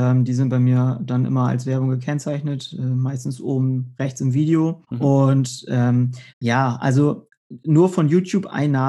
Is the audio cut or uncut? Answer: cut